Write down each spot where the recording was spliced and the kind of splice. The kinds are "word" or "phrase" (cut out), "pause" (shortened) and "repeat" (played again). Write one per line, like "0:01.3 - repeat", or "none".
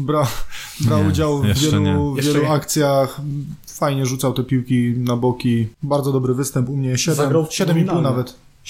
0:05.7 - pause